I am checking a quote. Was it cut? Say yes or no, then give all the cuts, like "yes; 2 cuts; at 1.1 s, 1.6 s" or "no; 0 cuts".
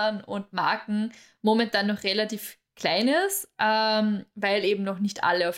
no; 0 cuts